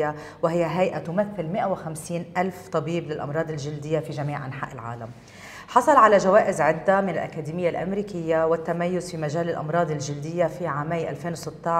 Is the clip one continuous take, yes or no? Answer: yes